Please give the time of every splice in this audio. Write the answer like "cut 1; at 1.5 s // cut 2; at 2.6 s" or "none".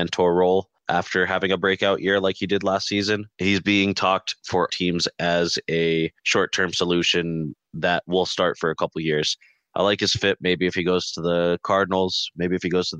cut 1; at 3.3 s // cut 2; at 4.7 s // cut 3; at 6.2 s